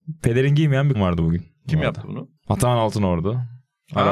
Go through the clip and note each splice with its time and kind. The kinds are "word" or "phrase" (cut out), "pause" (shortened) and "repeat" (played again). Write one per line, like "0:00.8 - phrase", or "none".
0:00.9 - word
0:02.4 - pause